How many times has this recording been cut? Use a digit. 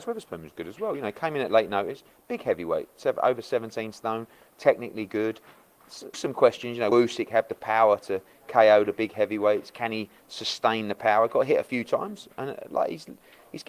2